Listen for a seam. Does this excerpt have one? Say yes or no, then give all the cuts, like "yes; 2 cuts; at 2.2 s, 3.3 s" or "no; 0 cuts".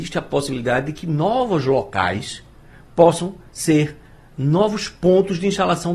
no; 0 cuts